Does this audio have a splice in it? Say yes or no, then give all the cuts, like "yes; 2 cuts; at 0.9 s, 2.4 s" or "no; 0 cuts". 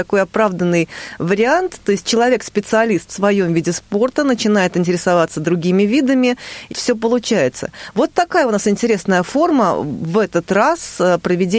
yes; 1 cut; at 6.7 s